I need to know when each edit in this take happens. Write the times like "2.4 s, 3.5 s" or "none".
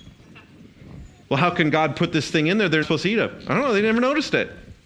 1.2 s, 2.8 s